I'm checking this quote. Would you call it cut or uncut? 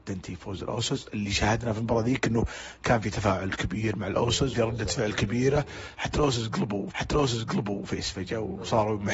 cut